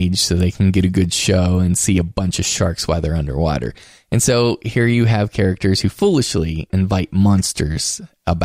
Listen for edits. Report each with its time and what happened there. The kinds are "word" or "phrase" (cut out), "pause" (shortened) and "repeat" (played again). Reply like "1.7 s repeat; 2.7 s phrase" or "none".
none

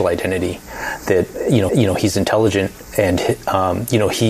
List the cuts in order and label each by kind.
1.7 s repeat

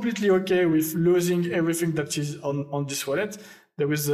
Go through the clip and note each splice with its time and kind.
none

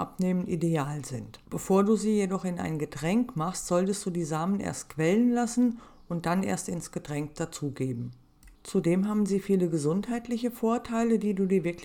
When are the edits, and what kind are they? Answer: 1.4 s pause

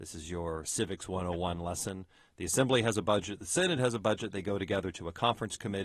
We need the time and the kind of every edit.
none

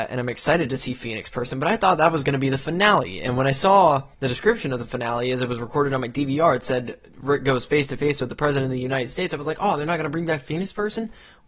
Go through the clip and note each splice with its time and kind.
4.1 s pause

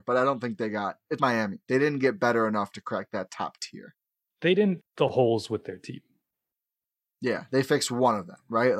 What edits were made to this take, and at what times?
1.2 s word; 4.8 s word

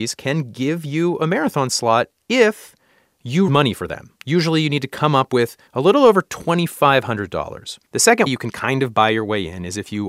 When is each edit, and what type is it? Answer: 3.5 s word; 4.2 s pause; 5.7 s pause; 7.8 s pause; 8.3 s word

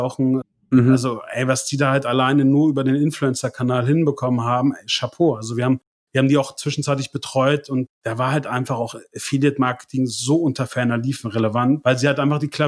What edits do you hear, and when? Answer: none

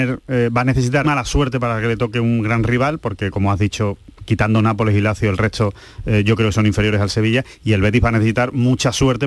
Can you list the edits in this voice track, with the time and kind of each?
1.0 s word

